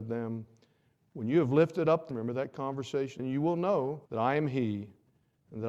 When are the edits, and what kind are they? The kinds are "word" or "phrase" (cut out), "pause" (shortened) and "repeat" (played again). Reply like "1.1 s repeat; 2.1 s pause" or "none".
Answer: 2.1 s phrase; 3.2 s word; 4.1 s pause